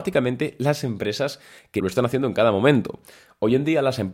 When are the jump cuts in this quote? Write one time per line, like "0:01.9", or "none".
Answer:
0:01.8